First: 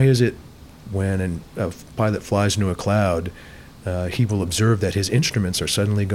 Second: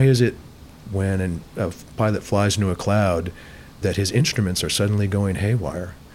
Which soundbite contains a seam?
second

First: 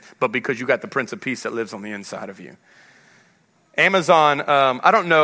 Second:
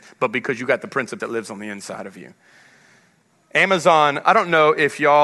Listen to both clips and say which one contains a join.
second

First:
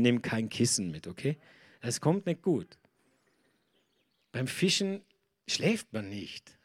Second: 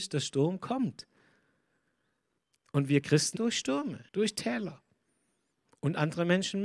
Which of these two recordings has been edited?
second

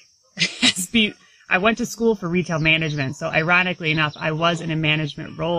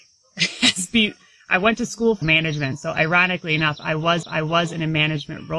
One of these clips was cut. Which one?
second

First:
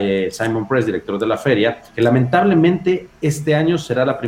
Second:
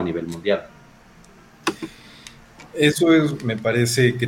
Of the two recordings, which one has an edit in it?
first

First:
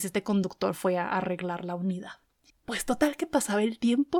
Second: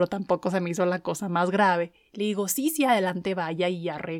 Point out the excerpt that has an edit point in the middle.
first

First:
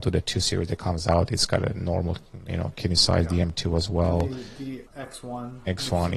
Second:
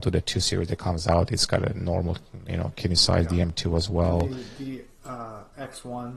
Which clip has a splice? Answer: first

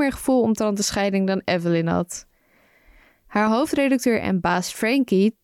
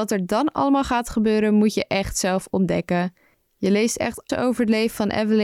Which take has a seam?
second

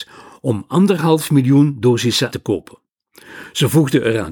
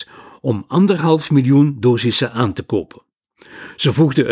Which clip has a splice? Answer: first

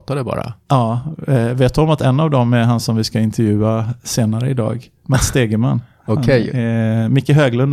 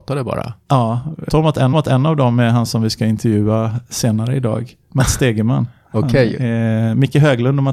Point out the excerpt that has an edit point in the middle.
second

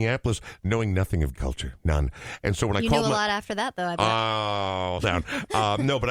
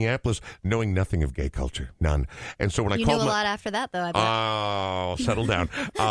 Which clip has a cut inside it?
first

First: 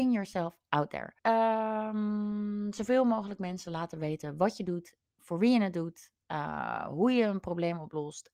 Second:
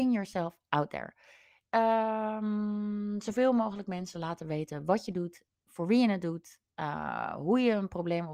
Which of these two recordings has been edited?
first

